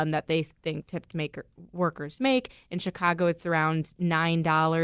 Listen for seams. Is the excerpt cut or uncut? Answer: uncut